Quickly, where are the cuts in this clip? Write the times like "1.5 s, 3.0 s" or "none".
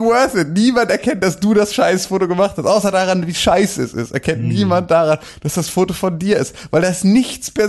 none